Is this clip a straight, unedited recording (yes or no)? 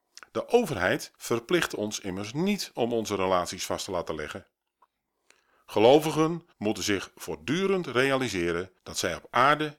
no